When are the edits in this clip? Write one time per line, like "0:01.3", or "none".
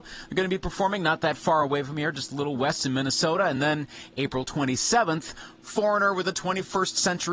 none